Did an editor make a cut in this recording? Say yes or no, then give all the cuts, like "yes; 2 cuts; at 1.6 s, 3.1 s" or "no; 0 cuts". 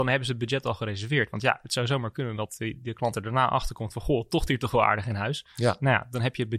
no; 0 cuts